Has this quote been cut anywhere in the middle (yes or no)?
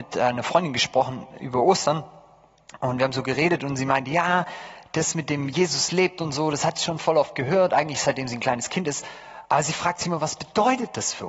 no